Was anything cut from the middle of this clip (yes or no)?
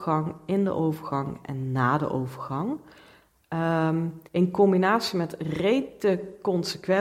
yes